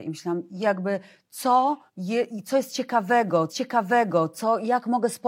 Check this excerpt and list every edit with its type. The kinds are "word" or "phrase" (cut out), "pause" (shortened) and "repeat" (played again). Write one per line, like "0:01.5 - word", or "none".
0:01.9 - pause
0:03.5 - repeat